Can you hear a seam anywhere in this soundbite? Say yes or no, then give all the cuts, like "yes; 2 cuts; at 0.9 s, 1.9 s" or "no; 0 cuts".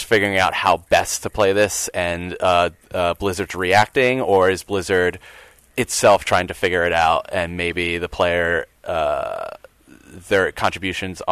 no; 0 cuts